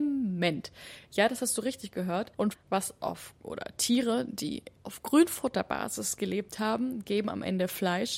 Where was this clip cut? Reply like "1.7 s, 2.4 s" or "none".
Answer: 2.5 s, 3.4 s, 4.8 s